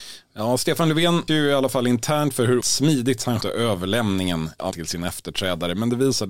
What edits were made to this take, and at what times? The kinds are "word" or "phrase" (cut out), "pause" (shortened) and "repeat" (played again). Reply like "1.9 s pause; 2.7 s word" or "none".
1.3 s word; 2.6 s word; 3.4 s word; 4.7 s word